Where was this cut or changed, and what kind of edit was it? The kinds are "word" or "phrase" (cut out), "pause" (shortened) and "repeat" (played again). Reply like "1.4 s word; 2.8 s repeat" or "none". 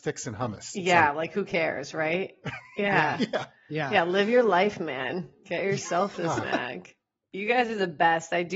7.3 s word

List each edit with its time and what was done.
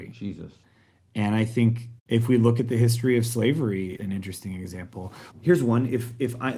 2.0 s pause; 4.0 s word; 5.3 s word

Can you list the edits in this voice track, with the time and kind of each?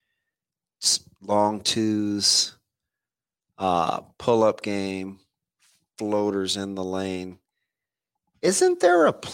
none

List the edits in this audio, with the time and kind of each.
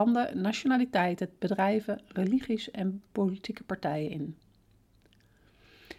1.4 s word; 3.1 s pause

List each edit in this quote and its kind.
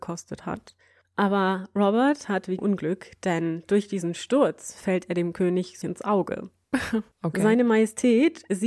2.6 s phrase; 5.8 s word; 7.1 s pause

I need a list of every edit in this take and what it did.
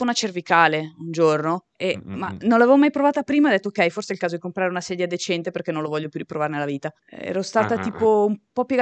1.7 s pause; 7.0 s pause

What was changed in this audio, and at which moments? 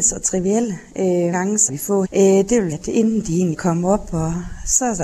1.3 s word; 1.7 s word; 2.0 s word; 2.7 s word; 3.5 s word

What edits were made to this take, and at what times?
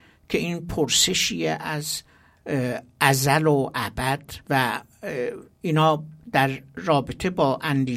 4.4 s pause

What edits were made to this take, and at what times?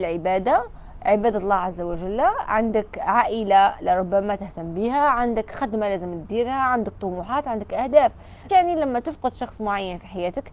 8.5 s word

